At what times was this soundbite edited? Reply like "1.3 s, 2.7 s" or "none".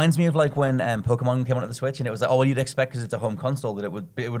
none